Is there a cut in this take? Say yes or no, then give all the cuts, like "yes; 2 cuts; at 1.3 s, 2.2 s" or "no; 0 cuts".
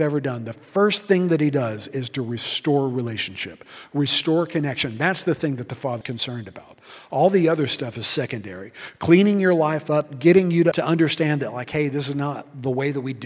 yes; 2 cuts; at 6.0 s, 10.7 s